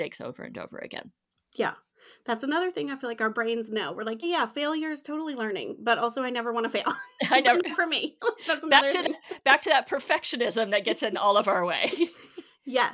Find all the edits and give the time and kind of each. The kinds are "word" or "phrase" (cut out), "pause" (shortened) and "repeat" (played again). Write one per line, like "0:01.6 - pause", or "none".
0:04.2 - word